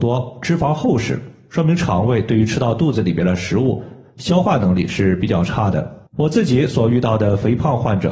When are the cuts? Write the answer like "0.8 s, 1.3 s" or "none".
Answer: 6.1 s